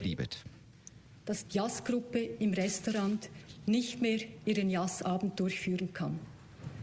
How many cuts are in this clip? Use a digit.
1